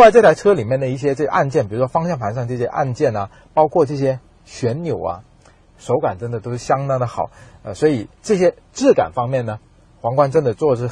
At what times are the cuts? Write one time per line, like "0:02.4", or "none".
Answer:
0:08.2